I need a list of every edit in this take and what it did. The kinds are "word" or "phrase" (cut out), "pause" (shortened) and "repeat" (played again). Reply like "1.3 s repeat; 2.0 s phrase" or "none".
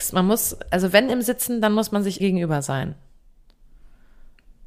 2.2 s word